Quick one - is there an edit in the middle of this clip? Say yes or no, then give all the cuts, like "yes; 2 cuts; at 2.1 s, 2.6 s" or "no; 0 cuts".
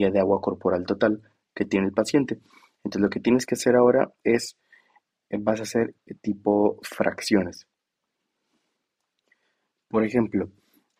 no; 0 cuts